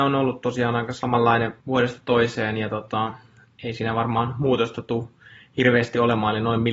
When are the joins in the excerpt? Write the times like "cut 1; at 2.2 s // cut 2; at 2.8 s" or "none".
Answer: cut 1; at 1.6 s